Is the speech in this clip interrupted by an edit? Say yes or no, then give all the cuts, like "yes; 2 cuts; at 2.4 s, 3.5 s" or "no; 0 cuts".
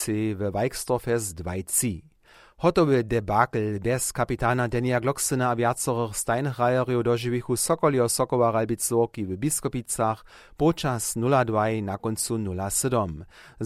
no; 0 cuts